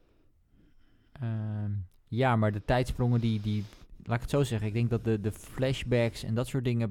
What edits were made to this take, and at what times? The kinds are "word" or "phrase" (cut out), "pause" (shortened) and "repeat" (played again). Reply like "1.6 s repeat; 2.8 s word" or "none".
none